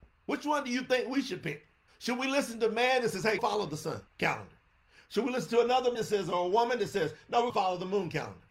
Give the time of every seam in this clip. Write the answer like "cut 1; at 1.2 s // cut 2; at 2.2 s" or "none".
cut 1; at 1.9 s // cut 2; at 3.4 s // cut 3; at 4.1 s // cut 4; at 5.9 s // cut 5; at 7.5 s